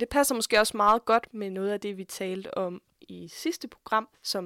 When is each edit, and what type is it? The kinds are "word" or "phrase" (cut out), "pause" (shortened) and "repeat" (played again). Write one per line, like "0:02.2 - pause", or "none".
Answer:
none